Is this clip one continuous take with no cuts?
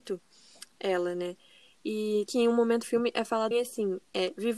no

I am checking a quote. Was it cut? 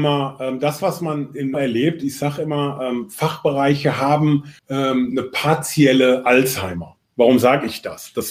yes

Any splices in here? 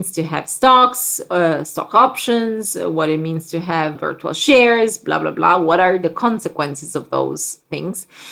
yes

